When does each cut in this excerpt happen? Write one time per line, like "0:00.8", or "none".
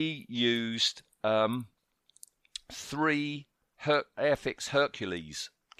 none